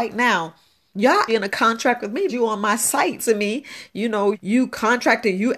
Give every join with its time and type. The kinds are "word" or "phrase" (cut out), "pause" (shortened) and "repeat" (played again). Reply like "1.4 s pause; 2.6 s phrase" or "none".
1.3 s word; 2.3 s word; 3.2 s word; 4.3 s word